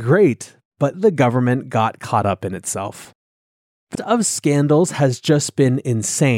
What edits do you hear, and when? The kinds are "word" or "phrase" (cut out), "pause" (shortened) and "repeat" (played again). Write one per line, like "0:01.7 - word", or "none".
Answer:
0:00.9 - word
0:03.9 - word